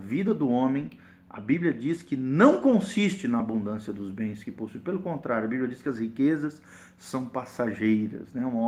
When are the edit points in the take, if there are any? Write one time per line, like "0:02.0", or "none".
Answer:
none